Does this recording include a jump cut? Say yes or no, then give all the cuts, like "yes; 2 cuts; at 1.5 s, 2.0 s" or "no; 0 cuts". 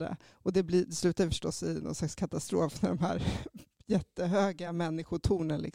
no; 0 cuts